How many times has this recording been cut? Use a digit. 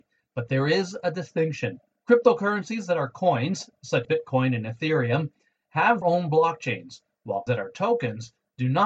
3